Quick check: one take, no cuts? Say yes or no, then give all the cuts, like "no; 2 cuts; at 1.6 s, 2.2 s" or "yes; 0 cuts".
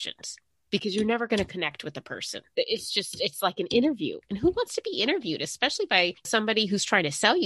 yes; 0 cuts